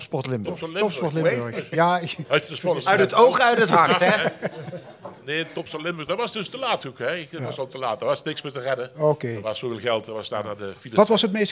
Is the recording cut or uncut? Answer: uncut